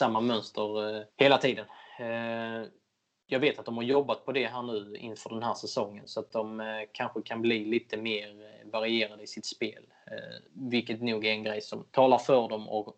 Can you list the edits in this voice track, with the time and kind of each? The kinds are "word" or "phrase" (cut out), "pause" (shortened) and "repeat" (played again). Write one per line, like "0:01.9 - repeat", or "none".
0:01.1 - pause
0:10.5 - pause